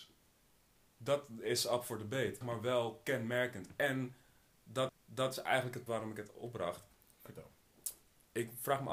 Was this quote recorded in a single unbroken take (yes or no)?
no